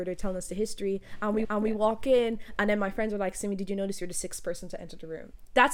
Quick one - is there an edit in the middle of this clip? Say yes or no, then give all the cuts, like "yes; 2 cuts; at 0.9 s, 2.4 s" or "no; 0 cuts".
yes; 1 cut; at 1.4 s